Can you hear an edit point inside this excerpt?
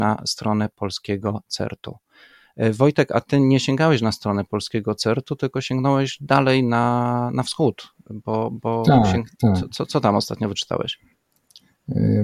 no; 0 cuts

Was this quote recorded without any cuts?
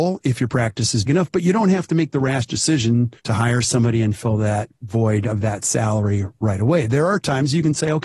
no; 2 cuts; at 1.1 s, 3.2 s

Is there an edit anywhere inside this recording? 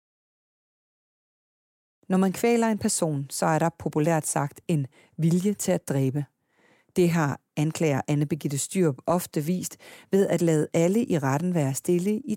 no; 0 cuts

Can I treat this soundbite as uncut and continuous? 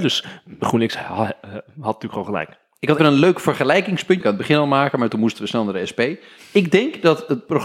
no; 2 cuts; at 3.0 s, 4.2 s

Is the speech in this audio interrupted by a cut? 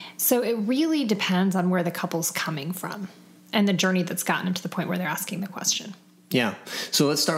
no; 0 cuts

